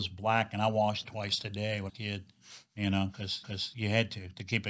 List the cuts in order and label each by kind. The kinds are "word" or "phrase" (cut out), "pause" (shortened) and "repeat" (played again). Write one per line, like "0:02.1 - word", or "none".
0:01.0 - word
0:01.9 - phrase
0:03.4 - repeat